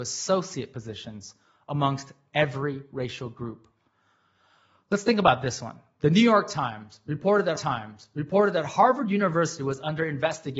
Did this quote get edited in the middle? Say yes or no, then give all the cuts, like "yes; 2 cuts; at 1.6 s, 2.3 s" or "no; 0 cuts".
yes; 1 cut; at 7.6 s